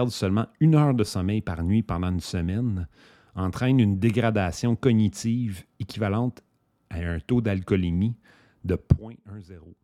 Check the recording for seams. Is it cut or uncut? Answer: uncut